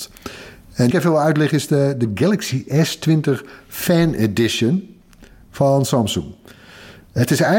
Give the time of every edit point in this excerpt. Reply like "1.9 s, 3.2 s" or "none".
0.9 s